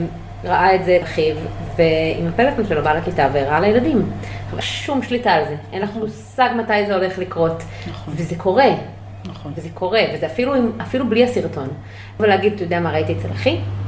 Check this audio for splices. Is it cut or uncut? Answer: cut